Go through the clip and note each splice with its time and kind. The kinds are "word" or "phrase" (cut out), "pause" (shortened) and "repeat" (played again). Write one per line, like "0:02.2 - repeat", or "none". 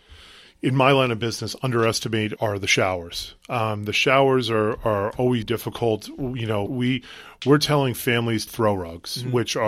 0:02.4 - word
0:05.4 - word
0:06.7 - word
0:08.5 - phrase